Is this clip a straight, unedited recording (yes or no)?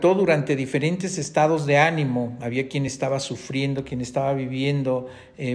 yes